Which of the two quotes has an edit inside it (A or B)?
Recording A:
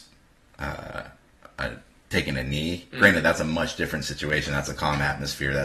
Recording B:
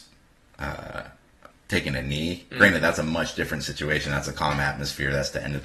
B